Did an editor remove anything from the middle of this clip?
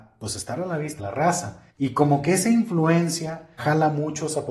yes; 3 cuts; at 1.0 s, 1.7 s, 3.6 s

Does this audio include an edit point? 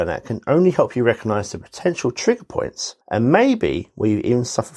yes; 1 cut; at 3.0 s

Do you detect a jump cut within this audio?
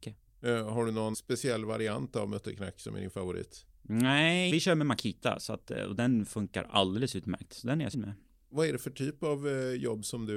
yes; 3 cuts; at 1.1 s, 4.5 s, 7.9 s

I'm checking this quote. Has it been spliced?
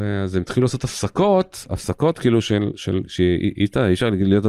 no; 0 cuts

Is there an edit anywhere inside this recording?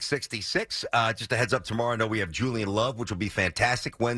no; 0 cuts

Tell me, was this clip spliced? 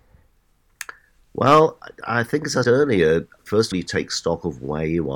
yes; 3 cuts; at 2.6 s, 3.4 s, 3.7 s

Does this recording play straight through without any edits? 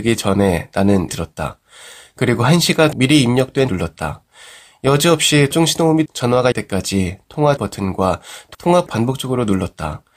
no; 8 cuts; at 1.1 s, 2.9 s, 3.7 s, 5.5 s, 6.1 s, 6.5 s, 7.6 s, 8.9 s

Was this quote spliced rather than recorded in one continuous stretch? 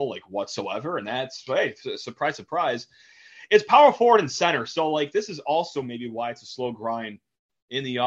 no; 0 cuts

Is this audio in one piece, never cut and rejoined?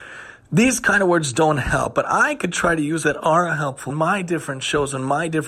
no; 2 cuts; at 3.0 s, 3.9 s

